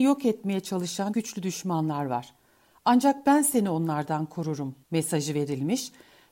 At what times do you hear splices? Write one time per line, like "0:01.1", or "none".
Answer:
0:01.1
0:04.8